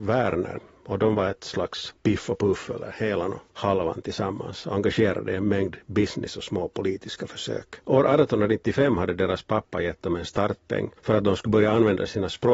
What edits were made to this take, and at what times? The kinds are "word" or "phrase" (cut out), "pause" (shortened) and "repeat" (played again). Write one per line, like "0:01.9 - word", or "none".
0:02.0 - pause
0:03.5 - pause
0:07.8 - pause
0:11.0 - pause